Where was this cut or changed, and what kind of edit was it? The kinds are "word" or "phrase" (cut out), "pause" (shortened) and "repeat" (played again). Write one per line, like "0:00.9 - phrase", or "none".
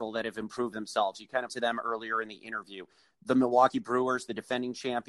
0:01.5 - word